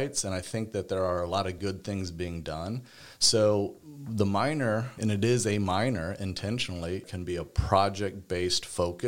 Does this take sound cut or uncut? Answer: uncut